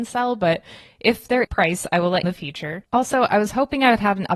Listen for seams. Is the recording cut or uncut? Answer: cut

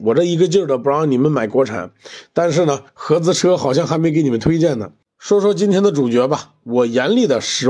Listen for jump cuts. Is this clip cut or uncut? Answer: cut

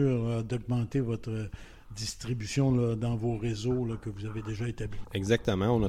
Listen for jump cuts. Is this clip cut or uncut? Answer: uncut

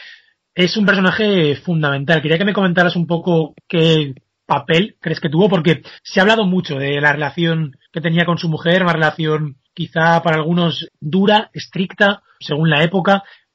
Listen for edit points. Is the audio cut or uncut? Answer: cut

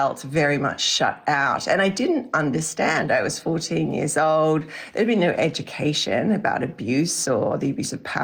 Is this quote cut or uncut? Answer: uncut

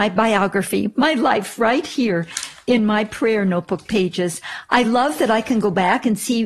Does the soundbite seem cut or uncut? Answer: uncut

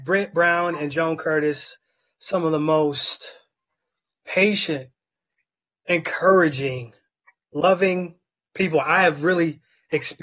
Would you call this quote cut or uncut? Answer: uncut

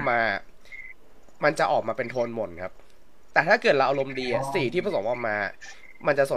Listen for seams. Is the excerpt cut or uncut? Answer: uncut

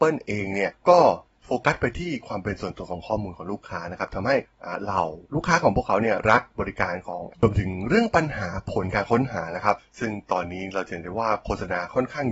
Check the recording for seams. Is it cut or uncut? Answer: cut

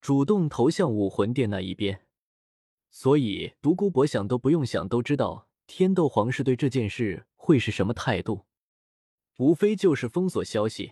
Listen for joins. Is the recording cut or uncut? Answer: uncut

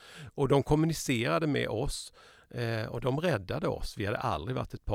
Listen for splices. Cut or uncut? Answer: uncut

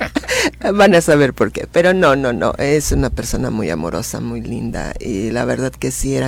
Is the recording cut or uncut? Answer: uncut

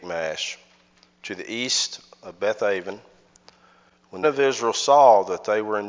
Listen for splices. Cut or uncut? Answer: cut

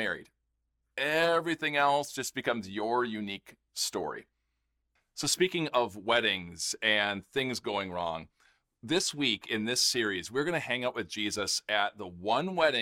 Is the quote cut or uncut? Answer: uncut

